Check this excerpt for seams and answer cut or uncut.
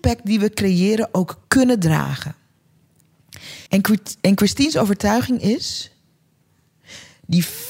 cut